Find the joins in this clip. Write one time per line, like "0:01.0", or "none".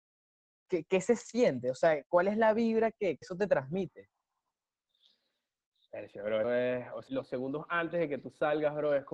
0:03.2
0:06.4
0:07.1